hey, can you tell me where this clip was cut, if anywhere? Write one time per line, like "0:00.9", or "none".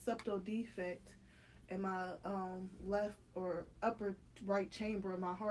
none